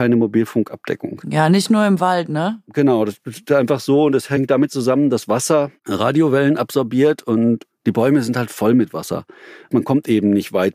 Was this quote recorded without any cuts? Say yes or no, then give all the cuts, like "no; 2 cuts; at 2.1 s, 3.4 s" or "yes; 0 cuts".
yes; 0 cuts